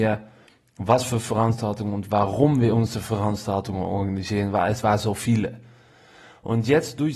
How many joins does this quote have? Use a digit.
0